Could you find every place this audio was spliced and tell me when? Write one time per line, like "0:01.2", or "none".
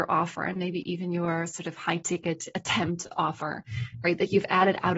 none